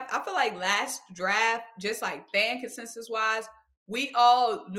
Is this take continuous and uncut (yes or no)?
yes